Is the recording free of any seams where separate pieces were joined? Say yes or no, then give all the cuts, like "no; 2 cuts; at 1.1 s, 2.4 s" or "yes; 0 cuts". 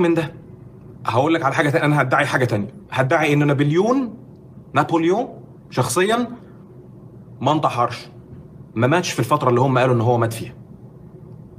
yes; 0 cuts